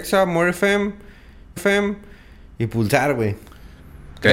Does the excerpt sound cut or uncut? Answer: cut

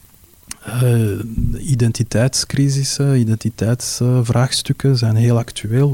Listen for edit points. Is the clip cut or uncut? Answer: uncut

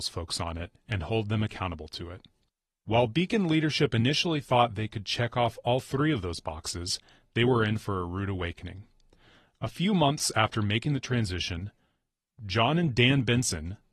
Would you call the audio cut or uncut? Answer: uncut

